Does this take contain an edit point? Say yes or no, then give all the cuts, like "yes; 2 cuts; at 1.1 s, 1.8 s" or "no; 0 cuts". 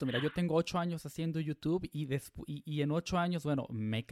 no; 0 cuts